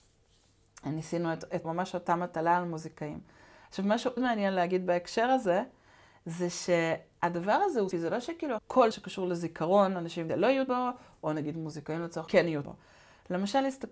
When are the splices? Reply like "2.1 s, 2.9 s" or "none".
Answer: 1.6 s, 4.2 s, 7.9 s, 8.6 s, 8.9 s, 10.3 s, 10.7 s, 12.3 s, 12.6 s